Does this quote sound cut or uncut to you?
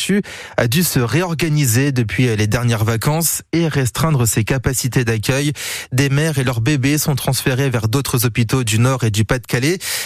uncut